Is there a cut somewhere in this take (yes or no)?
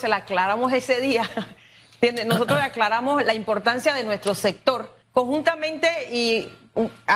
yes